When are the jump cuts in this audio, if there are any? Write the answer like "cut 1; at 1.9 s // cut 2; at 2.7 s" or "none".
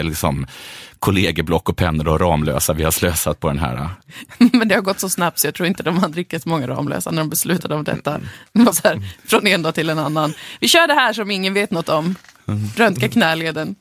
cut 1; at 8.7 s